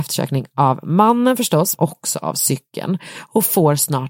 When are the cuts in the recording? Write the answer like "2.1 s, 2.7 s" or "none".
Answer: 1.8 s